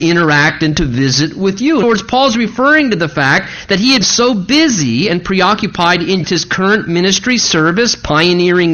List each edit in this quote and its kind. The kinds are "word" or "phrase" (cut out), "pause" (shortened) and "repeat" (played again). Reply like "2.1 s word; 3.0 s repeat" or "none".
1.8 s word; 4.0 s word; 6.2 s word